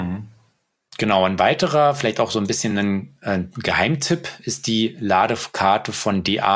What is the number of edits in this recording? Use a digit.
0